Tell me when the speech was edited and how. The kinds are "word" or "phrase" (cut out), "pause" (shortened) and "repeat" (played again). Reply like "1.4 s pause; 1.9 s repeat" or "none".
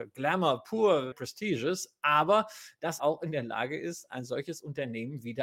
1.1 s word; 3.0 s word